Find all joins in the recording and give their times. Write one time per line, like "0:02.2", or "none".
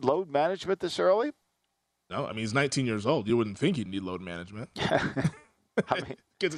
none